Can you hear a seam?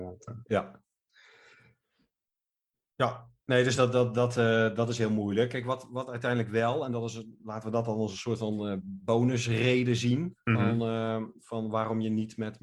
no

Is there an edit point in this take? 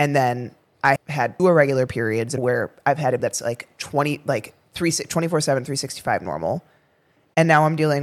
yes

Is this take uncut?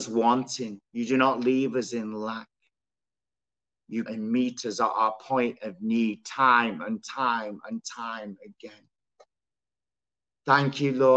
no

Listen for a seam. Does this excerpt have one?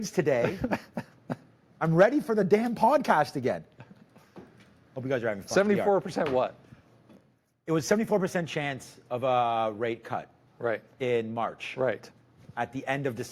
yes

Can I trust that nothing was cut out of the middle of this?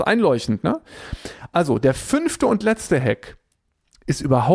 yes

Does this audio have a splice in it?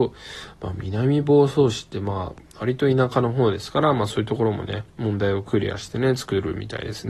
yes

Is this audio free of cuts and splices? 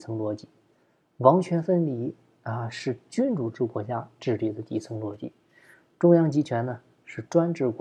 yes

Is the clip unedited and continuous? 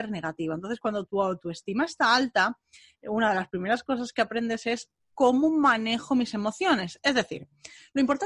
yes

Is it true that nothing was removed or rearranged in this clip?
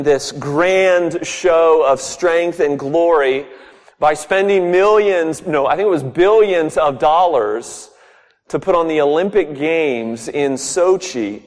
yes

